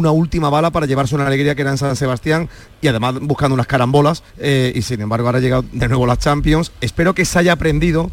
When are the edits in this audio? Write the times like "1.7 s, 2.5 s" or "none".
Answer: 4.3 s